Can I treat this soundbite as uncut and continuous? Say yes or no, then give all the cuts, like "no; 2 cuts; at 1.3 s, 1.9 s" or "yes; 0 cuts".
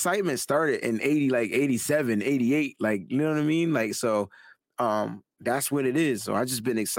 no; 1 cut; at 5.3 s